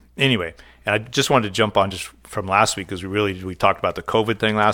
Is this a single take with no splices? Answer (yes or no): yes